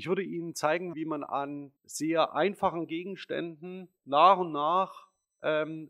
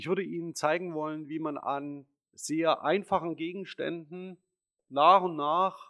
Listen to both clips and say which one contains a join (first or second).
first